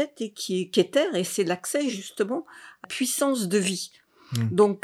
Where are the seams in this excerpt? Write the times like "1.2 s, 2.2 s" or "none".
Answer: 2.8 s